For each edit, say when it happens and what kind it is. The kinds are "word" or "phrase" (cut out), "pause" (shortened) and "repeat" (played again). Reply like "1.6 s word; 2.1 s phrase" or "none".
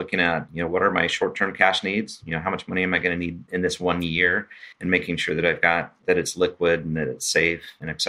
4.7 s pause